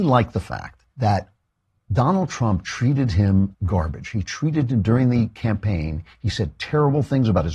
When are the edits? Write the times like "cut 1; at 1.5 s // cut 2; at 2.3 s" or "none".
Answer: cut 1; at 0.9 s // cut 2; at 3.5 s